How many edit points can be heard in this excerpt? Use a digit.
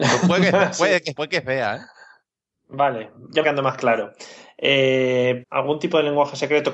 3